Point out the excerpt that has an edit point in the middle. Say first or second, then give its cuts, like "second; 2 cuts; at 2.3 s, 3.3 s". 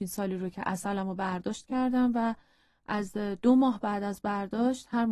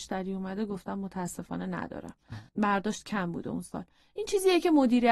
second; 1 cut; at 2.5 s